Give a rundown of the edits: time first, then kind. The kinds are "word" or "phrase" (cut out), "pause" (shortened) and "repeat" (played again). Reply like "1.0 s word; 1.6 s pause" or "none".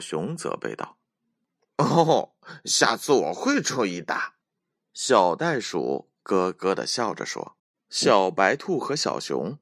4.4 s pause; 7.6 s pause

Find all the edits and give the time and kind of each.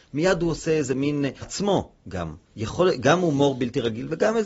1.4 s word; 2.4 s pause

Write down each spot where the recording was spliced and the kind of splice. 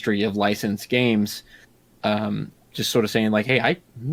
2.6 s word

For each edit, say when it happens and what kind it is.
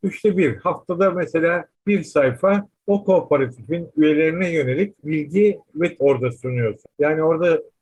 5.0 s word; 6.0 s word

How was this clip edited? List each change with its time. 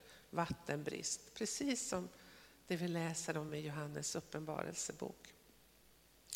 none

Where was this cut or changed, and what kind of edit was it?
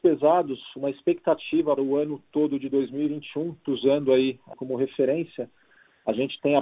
1.8 s word; 3.6 s word; 4.5 s word

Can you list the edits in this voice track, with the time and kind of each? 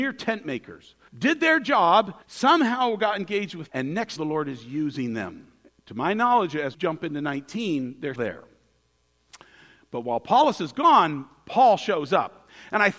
1.1 s phrase; 2.2 s pause; 3.7 s word; 4.2 s phrase; 5.6 s pause; 6.7 s word; 8.2 s word

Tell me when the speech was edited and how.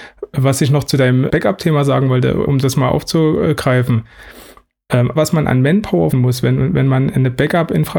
1.3 s word; 2.5 s word; 5.2 s word; 6.1 s word

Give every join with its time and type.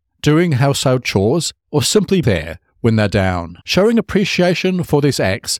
1.6 s pause; 2.2 s word; 3.6 s pause

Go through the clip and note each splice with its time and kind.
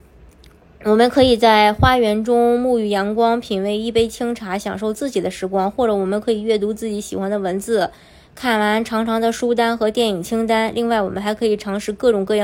none

